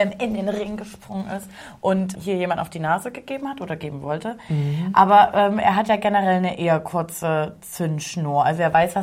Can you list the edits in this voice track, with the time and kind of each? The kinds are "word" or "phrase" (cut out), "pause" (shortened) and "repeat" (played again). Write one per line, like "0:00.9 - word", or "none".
0:02.1 - word